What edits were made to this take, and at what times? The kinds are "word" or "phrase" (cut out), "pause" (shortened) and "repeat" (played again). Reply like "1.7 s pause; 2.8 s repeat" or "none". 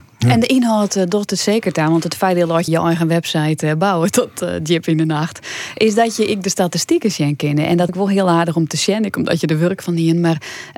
2.7 s word; 7.9 s word